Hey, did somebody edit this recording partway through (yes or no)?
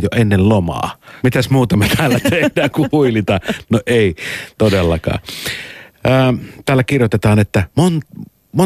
yes